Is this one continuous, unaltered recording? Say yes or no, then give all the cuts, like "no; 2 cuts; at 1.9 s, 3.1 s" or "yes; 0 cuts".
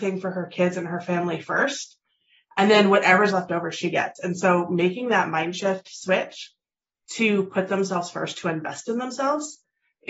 yes; 0 cuts